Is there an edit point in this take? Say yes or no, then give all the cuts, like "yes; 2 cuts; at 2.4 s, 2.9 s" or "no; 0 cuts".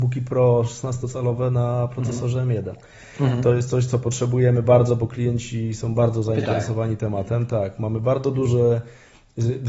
no; 0 cuts